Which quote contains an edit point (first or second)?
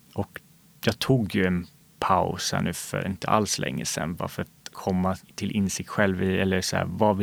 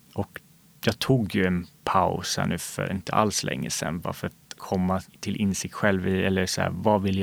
second